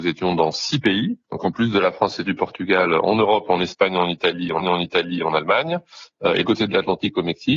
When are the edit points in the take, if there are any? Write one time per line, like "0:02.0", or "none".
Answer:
0:04.6
0:06.4